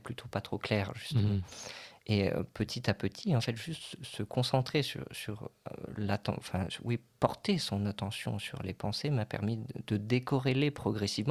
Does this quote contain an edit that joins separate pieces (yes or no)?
no